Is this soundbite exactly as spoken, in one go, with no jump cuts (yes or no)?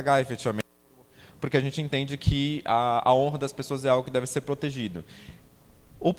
yes